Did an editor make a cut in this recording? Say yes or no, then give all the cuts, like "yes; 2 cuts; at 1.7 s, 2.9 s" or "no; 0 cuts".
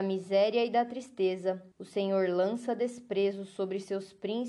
yes; 1 cut; at 1.7 s